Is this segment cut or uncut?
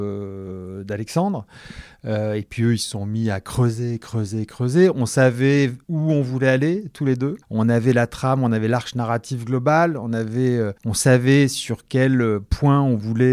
cut